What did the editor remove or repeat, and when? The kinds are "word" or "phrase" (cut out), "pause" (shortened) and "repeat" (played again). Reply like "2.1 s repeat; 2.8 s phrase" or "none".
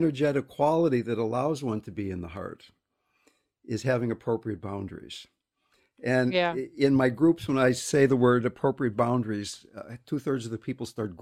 none